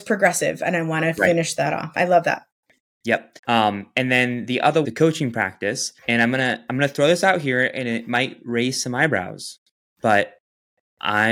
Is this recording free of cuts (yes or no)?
no